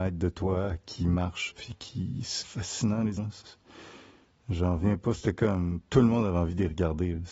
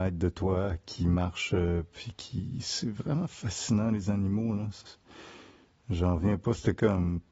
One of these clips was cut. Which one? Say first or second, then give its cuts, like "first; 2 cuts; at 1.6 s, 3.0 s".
first; 3 cuts; at 1.5 s, 2.4 s, 3.2 s